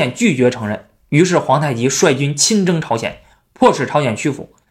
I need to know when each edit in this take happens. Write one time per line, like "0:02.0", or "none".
none